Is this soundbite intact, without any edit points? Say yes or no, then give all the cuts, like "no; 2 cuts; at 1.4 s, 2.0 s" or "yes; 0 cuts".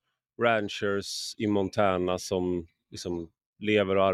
yes; 0 cuts